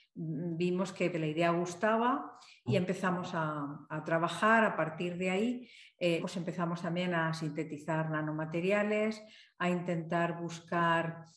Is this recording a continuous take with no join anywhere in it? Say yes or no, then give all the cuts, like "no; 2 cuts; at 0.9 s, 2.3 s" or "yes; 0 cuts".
no; 4 cuts; at 1.1 s, 2.7 s, 3.9 s, 6.2 s